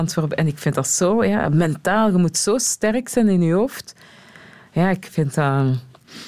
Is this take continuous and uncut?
yes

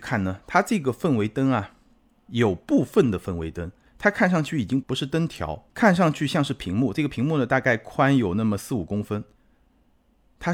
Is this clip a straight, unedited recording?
no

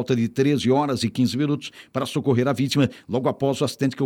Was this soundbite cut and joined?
no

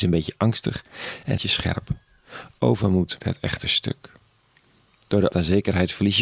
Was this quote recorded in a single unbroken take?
no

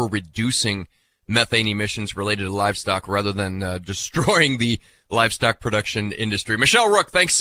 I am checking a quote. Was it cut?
no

